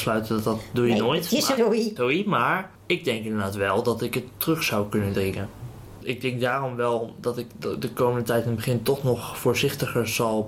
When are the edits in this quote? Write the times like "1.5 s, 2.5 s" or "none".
1.6 s, 2.0 s, 2.7 s